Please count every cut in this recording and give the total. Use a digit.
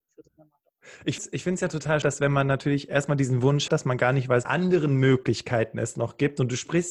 4